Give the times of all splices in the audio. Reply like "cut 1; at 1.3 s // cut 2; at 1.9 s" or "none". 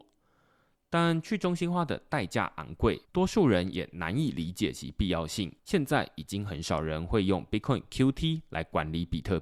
cut 1; at 3.0 s // cut 2; at 5.6 s